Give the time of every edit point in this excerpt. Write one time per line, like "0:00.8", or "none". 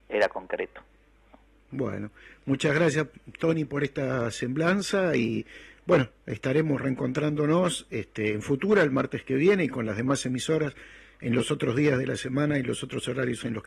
none